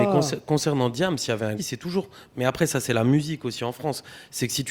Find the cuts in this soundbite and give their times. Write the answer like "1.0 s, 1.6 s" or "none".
1.6 s